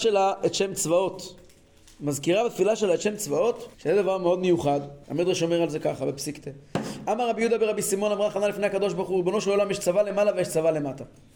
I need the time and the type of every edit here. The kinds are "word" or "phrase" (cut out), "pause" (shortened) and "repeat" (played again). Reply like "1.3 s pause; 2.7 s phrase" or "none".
1.8 s pause; 3.7 s pause; 5.0 s pause

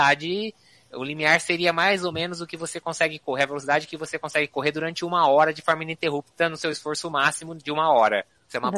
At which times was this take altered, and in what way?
none

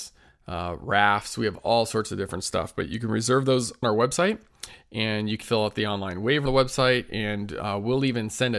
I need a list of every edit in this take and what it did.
3.8 s word; 5.4 s word; 6.5 s word

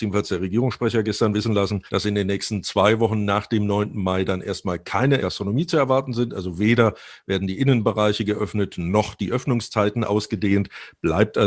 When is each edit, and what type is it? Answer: 1.9 s pause; 5.2 s phrase

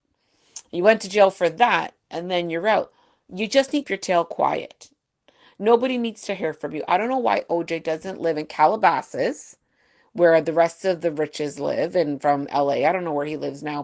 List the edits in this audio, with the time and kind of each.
3.8 s phrase

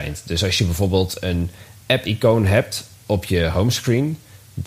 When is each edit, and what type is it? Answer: 2.9 s pause

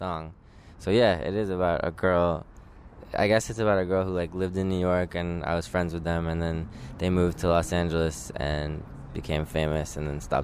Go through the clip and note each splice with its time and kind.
none

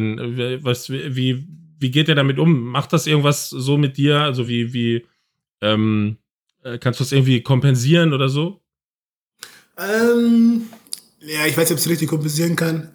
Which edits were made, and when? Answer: none

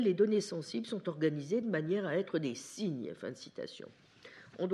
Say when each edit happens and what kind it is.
none

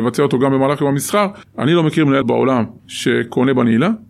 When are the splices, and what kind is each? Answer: 2.2 s word

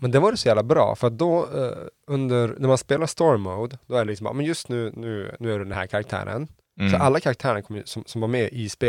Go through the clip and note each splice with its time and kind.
none

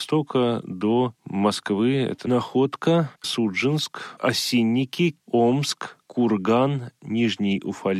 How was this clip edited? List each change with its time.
3.2 s word; 5.2 s word; 6.0 s pause

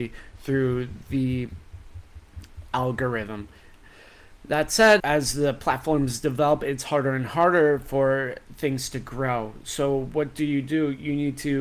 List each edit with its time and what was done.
5.0 s phrase

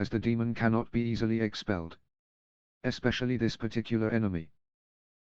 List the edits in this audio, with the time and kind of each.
none

